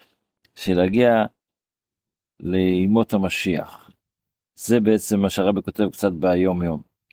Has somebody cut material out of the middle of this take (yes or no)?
no